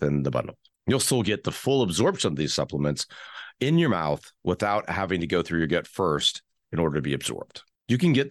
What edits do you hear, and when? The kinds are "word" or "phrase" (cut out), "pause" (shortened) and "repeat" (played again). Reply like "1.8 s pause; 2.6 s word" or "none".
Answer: none